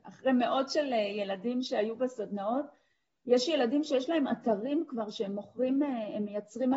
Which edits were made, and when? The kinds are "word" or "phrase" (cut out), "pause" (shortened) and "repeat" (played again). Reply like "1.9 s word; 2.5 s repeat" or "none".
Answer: none